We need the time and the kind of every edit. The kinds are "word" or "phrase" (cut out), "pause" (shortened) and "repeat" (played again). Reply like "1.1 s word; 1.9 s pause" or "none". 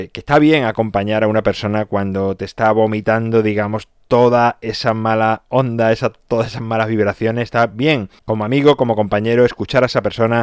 8.2 s pause